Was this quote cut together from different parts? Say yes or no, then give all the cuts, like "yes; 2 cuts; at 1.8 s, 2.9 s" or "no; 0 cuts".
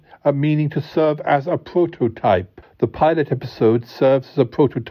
no; 0 cuts